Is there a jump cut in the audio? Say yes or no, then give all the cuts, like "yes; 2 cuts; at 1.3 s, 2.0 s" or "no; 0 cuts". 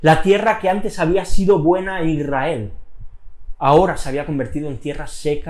no; 0 cuts